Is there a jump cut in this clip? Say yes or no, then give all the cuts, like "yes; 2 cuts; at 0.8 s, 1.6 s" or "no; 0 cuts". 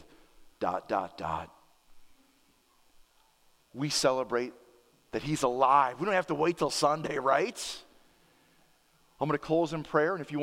no; 0 cuts